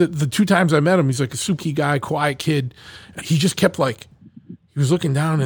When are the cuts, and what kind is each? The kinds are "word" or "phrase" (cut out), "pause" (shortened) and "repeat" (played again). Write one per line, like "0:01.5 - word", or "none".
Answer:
0:01.6 - word
0:03.2 - word